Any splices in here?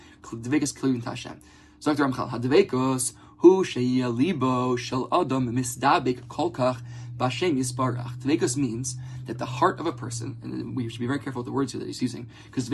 no; 0 cuts

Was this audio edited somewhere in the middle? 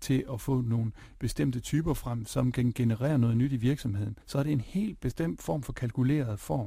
yes; 1 cut; at 4.2 s

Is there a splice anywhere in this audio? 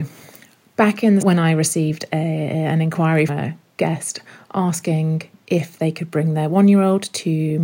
yes; 2 cuts; at 1.2 s, 3.3 s

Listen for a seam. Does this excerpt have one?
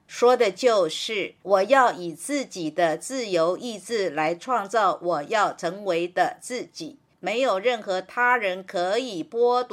yes; 1 cut; at 1.4 s

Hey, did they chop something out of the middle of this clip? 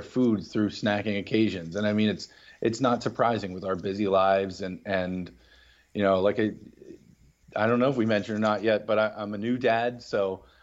no; 0 cuts

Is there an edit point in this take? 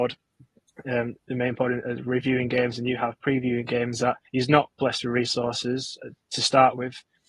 yes; 1 cut; at 4.3 s

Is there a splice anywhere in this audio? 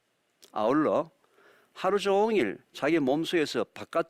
no; 0 cuts

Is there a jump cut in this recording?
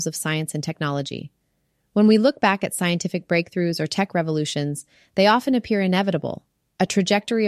no; 0 cuts

